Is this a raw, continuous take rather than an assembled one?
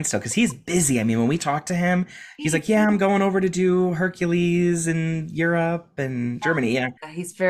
yes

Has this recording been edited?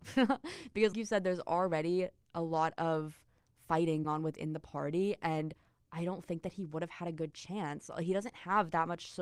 yes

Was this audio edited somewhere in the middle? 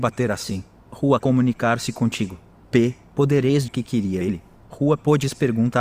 yes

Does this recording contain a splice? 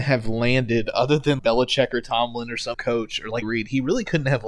yes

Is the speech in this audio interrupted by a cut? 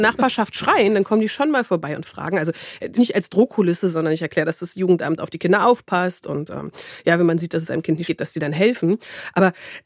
yes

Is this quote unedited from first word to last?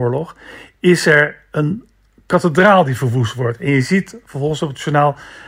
yes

